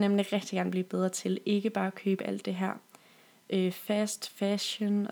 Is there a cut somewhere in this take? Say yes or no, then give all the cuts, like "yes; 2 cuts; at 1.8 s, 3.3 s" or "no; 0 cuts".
no; 0 cuts